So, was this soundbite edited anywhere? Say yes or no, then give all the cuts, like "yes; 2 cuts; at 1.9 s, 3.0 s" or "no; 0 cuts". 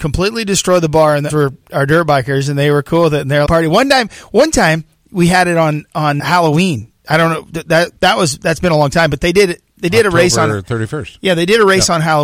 yes; 4 cuts; at 1.3 s, 3.5 s, 6.2 s, 8.0 s